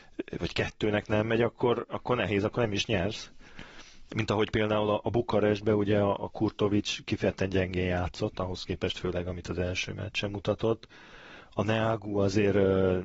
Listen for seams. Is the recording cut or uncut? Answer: uncut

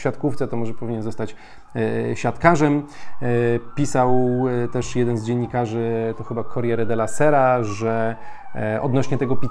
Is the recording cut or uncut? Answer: uncut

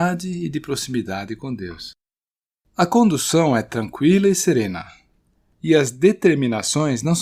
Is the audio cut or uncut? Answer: uncut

